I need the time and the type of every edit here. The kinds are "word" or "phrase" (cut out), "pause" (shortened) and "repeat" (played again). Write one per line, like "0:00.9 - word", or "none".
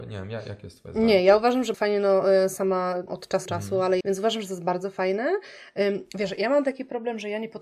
0:01.7 - word
0:03.1 - word
0:03.5 - word
0:04.0 - word